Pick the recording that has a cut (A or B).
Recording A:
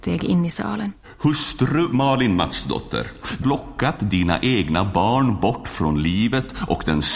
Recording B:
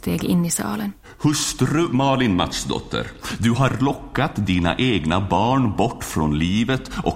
A